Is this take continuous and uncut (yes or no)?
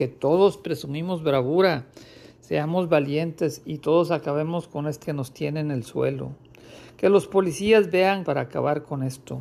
no